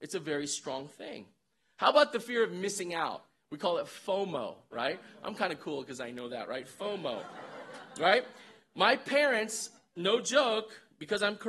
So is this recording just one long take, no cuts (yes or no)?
yes